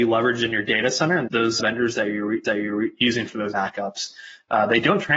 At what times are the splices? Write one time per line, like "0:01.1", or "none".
0:01.3
0:01.6
0:02.4
0:03.5